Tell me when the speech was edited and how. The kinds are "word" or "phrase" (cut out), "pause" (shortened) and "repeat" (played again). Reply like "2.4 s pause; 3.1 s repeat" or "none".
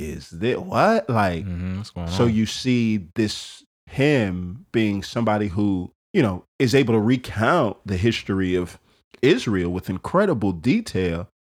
6.0 s pause